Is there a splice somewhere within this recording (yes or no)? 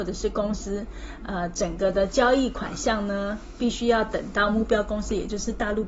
no